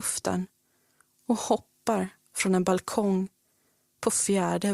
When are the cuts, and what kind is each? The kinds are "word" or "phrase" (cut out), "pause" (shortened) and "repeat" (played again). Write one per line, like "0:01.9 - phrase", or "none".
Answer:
none